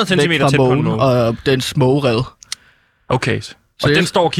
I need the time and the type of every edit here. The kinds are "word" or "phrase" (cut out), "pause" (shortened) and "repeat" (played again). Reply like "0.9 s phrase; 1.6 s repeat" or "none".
none